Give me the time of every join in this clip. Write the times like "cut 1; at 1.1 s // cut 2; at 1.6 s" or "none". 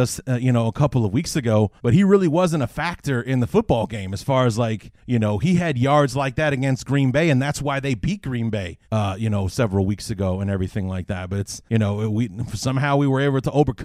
cut 1; at 1.8 s // cut 2; at 5.0 s // cut 3; at 8.8 s // cut 4; at 11.7 s